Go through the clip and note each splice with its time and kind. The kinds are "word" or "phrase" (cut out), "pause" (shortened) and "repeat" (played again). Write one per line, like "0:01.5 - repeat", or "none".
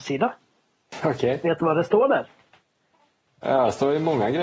none